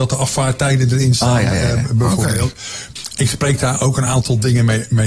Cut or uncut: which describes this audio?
uncut